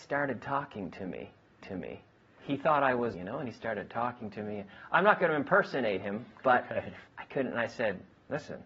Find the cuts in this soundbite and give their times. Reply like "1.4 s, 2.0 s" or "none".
1.6 s, 3.1 s, 7.1 s

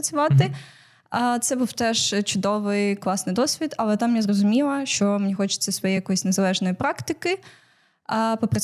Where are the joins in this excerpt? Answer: none

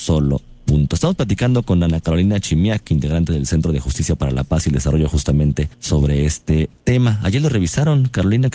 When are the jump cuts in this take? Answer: 5.7 s

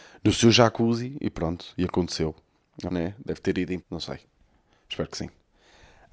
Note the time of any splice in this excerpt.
2.9 s, 3.8 s

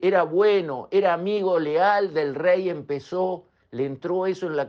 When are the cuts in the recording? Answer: none

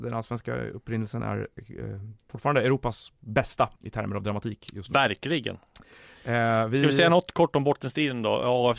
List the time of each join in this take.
3.8 s

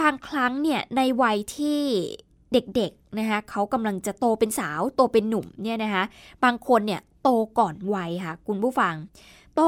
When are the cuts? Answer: none

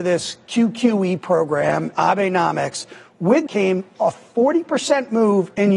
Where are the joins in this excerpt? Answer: 1.9 s, 3.5 s

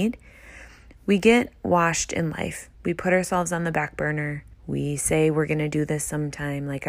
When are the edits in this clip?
2.7 s, 4.5 s

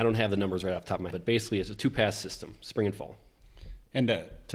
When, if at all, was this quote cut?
1.1 s

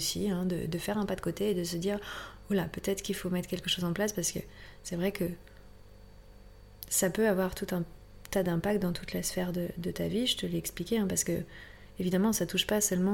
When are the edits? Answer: none

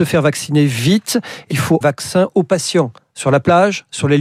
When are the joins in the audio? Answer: 1.5 s, 1.8 s, 3.0 s

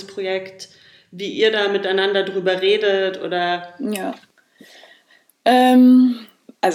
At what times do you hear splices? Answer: none

